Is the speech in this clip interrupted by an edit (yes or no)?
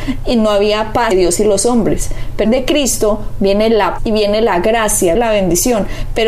yes